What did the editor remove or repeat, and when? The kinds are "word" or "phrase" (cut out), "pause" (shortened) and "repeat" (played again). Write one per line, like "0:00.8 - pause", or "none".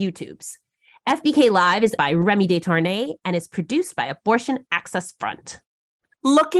0:02.0 - word